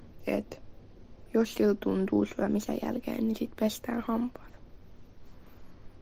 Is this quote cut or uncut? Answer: uncut